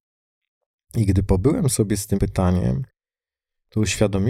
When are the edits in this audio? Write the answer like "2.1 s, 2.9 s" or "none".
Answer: 2.2 s